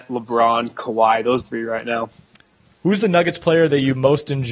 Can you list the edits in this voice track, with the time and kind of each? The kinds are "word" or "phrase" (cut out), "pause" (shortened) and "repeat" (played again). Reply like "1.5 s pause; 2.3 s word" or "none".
1.4 s phrase